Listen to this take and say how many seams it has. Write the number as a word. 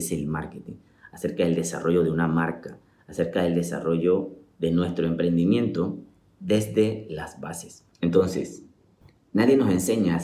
one